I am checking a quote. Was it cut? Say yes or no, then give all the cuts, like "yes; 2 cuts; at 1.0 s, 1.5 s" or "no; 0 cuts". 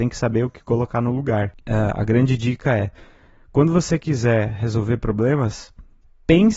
no; 0 cuts